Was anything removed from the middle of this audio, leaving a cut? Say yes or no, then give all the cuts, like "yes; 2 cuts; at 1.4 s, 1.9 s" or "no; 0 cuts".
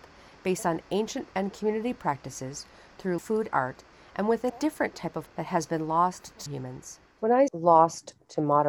yes; 7 cuts; at 1.3 s, 3.2 s, 3.5 s, 4.5 s, 5.3 s, 6.5 s, 7.5 s